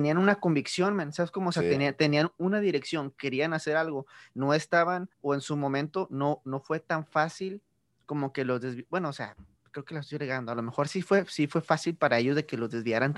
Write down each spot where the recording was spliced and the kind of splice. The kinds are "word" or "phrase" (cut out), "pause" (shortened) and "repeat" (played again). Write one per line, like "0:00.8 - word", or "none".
0:05.1 - pause